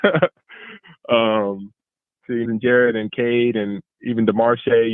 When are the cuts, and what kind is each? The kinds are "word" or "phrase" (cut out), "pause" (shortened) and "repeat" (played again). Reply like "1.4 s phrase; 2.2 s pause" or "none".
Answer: 2.4 s phrase